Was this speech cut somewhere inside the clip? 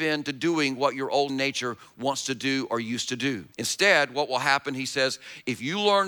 yes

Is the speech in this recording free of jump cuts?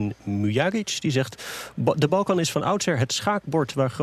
yes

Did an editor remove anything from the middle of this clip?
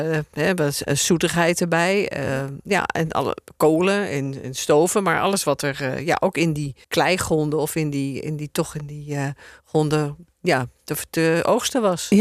yes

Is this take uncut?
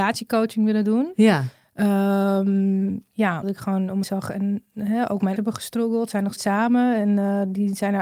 no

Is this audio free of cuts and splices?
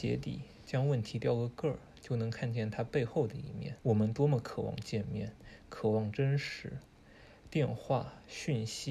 no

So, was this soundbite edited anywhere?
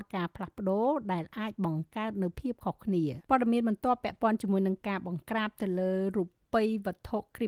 yes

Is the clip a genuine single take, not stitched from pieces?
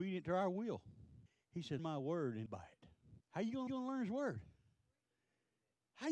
no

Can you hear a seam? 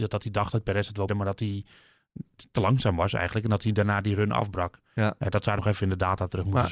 yes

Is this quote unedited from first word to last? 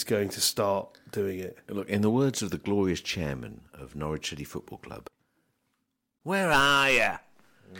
yes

